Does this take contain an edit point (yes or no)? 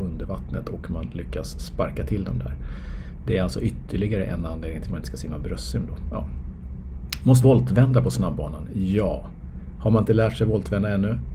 yes